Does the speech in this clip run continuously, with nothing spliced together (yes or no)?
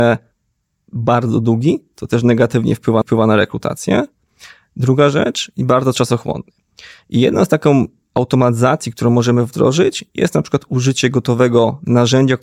no